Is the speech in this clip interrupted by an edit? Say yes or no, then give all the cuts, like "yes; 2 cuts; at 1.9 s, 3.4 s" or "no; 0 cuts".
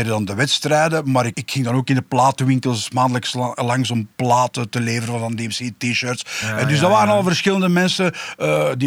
yes; 1 cut; at 1.3 s